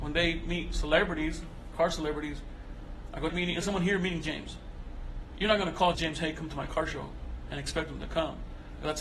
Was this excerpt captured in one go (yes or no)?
no